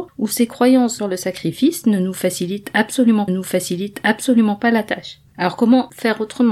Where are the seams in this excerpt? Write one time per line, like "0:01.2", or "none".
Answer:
0:01.0
0:03.3
0:05.3